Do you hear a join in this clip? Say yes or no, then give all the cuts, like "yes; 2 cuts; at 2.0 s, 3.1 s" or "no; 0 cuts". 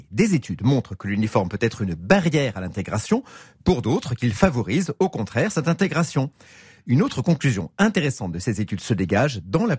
no; 0 cuts